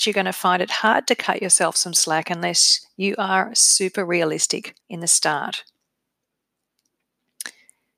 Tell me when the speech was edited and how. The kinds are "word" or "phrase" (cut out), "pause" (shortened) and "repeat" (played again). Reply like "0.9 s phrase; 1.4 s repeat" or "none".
4.8 s pause